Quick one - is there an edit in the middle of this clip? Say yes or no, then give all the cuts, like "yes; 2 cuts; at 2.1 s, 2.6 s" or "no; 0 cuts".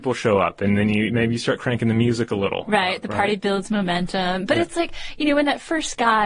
no; 0 cuts